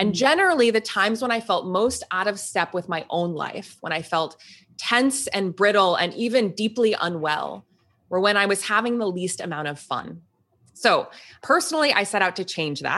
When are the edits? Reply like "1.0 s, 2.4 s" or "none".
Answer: none